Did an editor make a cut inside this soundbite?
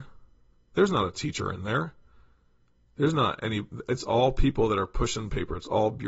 no; 0 cuts

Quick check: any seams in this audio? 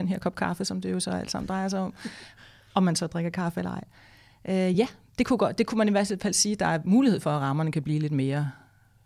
no; 0 cuts

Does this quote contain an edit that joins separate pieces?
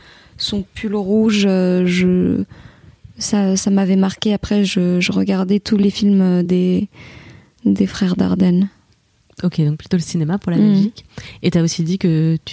no; 0 cuts

